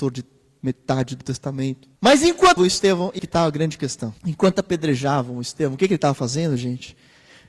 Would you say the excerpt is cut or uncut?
cut